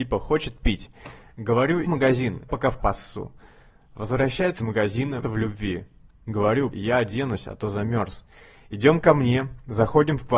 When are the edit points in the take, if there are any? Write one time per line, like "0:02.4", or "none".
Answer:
0:01.8
0:02.5
0:02.8
0:04.6
0:05.2
0:06.7